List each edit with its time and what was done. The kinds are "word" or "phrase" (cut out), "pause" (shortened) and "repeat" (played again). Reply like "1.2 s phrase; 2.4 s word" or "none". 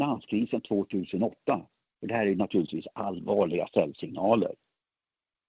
none